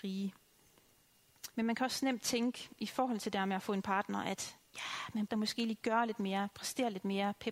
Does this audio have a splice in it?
yes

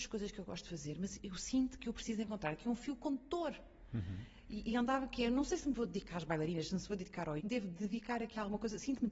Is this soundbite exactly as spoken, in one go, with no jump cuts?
no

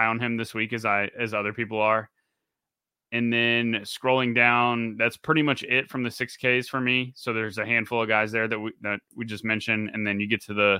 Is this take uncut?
yes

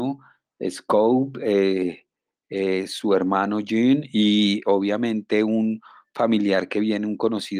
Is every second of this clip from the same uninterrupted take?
yes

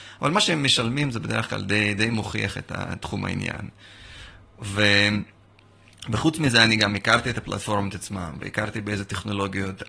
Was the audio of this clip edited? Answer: no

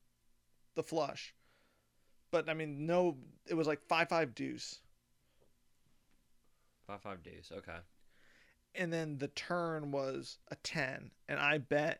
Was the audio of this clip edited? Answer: yes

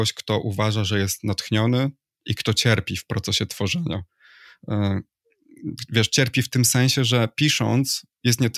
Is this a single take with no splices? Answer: yes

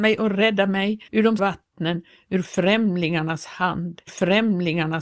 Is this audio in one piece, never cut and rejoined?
no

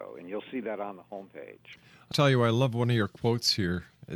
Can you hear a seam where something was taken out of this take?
yes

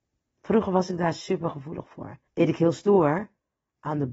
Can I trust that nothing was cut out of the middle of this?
no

